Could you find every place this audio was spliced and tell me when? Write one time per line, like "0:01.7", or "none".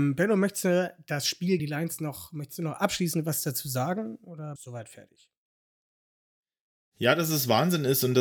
0:01.6
0:04.6